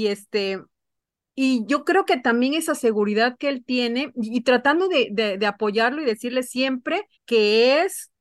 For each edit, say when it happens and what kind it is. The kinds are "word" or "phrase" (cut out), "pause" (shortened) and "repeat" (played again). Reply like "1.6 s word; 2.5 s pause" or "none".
7.2 s pause